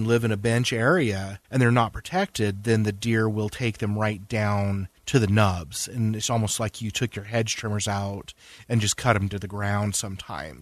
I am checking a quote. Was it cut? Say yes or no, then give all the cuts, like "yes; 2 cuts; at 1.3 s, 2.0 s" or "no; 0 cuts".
yes; 2 cuts; at 1.4 s, 5.0 s